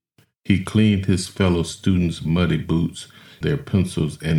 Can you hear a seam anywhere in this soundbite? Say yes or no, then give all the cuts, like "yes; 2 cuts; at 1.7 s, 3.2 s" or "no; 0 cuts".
yes; 1 cut; at 3.4 s